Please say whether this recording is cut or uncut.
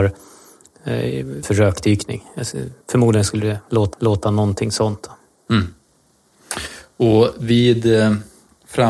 cut